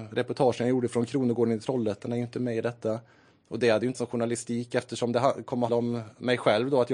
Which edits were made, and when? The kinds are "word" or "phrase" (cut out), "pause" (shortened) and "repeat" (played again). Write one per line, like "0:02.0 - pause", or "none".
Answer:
0:03.9 - word
0:05.7 - word